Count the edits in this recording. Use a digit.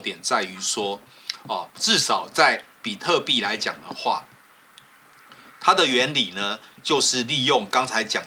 1